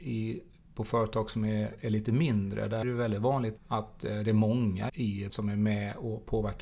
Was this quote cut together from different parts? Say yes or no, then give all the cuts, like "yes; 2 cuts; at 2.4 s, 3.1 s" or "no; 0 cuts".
yes; 4 cuts; at 2.8 s, 3.6 s, 4.9 s, 5.3 s